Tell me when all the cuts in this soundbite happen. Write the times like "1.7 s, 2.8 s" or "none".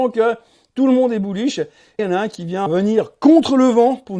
2.0 s, 2.7 s